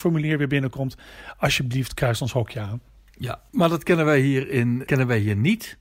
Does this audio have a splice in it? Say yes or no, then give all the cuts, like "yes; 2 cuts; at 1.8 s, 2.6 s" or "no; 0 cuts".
yes; 2 cuts; at 3.5 s, 4.9 s